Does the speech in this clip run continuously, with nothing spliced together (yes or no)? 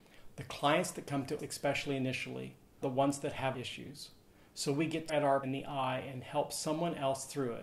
no